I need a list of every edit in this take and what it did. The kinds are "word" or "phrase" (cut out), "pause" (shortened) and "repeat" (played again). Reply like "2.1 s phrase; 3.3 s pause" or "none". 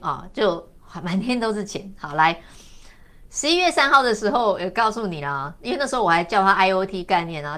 none